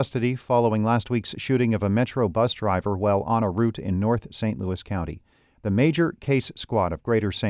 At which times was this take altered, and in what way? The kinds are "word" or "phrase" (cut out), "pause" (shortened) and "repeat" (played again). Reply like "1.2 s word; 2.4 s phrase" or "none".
none

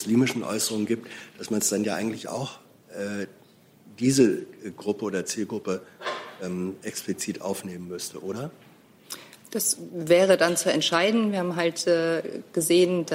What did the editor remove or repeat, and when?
none

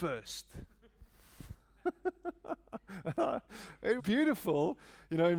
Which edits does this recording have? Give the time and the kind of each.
4.0 s word

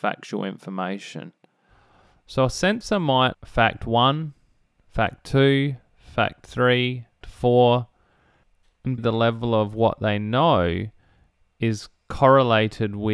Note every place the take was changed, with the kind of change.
3.3 s word; 7.2 s word; 9.0 s word

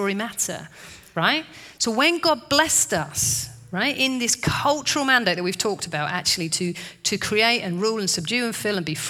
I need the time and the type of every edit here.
none

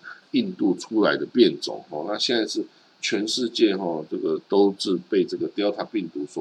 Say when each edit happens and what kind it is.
none

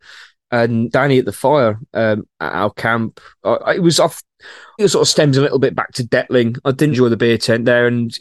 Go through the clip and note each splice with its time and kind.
0.9 s word; 2.3 s word; 3.6 s word; 4.8 s word; 6.9 s word

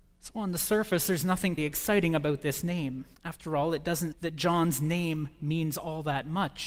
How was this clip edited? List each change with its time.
1.6 s word; 3.1 s pause; 4.1 s word

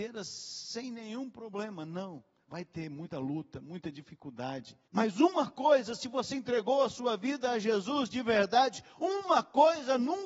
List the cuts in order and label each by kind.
4.9 s pause

